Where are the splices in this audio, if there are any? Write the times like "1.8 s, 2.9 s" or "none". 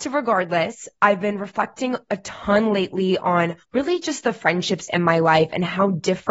3.6 s